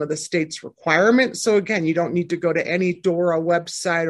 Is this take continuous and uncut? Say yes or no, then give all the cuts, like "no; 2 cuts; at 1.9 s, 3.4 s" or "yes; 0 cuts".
yes; 0 cuts